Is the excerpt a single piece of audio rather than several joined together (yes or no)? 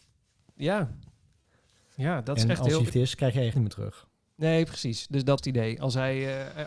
no